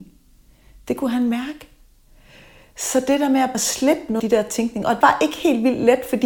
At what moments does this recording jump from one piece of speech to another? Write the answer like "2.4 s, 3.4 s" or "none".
3.5 s, 4.2 s, 5.0 s